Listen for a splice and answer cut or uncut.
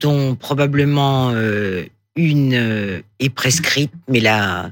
uncut